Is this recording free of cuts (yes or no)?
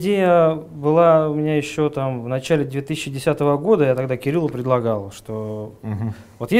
yes